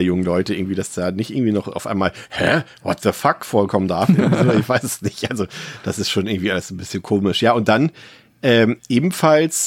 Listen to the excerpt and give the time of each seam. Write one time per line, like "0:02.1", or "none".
none